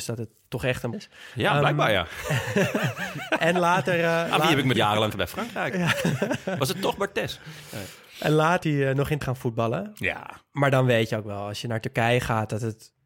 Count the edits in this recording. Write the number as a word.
five